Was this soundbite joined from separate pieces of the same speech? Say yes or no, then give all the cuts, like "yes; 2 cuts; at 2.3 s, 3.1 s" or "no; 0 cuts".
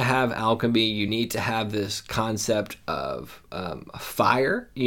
no; 0 cuts